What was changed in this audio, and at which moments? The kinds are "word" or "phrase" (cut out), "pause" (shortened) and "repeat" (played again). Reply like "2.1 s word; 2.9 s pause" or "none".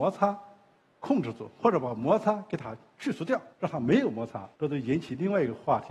3.5 s pause; 4.5 s pause